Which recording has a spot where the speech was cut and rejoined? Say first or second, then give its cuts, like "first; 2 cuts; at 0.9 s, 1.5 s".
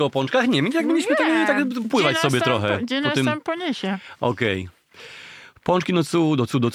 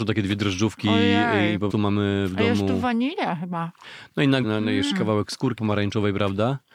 second; 4 cuts; at 1.7 s, 4.4 s, 4.9 s, 5.6 s